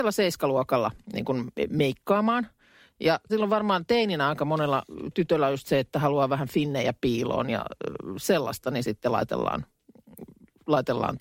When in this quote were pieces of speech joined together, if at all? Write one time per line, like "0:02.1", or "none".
0:01.0
0:03.3